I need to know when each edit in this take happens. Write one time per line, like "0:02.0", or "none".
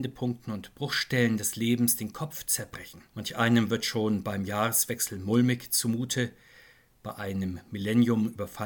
0:03.1